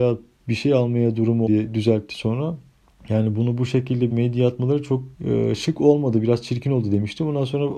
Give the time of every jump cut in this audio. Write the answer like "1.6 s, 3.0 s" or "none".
1.5 s, 2.8 s, 4.1 s, 5.1 s